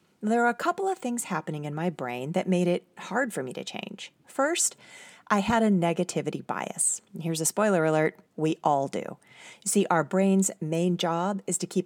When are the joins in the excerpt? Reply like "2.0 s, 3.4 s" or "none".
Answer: 7.1 s, 8.3 s